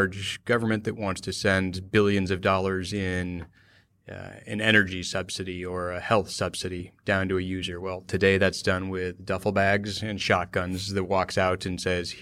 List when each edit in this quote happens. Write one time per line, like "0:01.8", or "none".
none